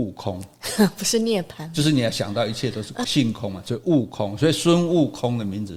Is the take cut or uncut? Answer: cut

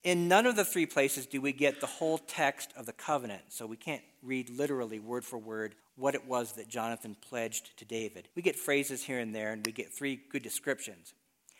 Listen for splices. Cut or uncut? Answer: cut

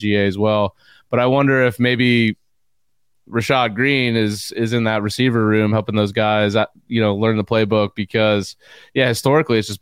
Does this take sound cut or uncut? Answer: uncut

